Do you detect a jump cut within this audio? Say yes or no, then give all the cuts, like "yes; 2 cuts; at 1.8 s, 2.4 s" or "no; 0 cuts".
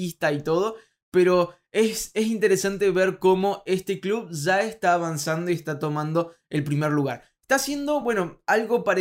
no; 0 cuts